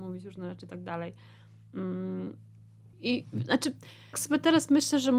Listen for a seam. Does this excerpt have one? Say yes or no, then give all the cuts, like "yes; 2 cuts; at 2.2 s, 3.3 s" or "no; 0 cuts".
yes; 2 cuts; at 2.9 s, 4.1 s